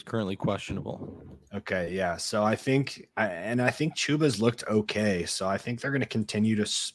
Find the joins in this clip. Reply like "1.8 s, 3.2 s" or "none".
3.1 s